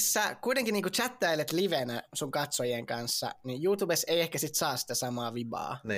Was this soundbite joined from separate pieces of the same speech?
no; 0 cuts

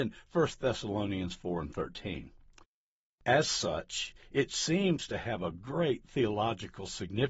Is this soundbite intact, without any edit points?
yes; 0 cuts

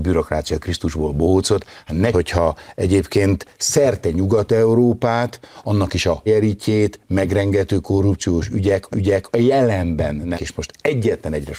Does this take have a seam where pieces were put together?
yes; 4 cuts; at 2.1 s, 6.3 s, 8.9 s, 10.3 s

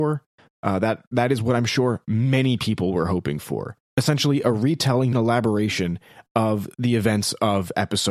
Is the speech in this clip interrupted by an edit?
yes; 2 cuts; at 5.1 s, 6.7 s

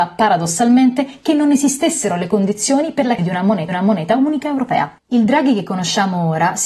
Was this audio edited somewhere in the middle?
yes; 3 cuts; at 3.2 s, 3.7 s, 5.0 s

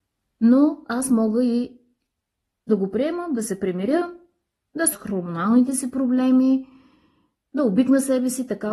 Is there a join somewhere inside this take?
yes; 2 cuts; at 2.7 s, 4.9 s

